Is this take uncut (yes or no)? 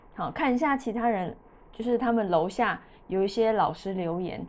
yes